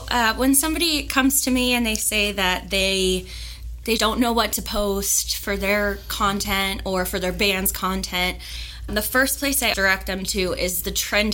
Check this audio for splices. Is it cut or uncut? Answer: cut